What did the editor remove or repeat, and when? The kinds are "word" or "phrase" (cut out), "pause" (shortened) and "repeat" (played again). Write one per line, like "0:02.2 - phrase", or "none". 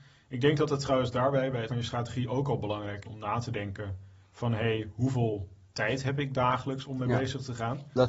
0:01.7 - word
0:03.0 - word